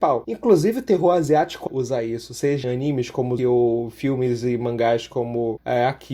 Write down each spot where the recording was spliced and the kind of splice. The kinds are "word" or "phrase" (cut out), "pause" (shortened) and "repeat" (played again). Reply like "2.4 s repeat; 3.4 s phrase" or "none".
1.7 s word; 2.6 s word; 3.4 s word